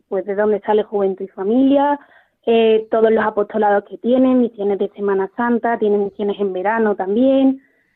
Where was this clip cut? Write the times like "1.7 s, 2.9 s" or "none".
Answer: none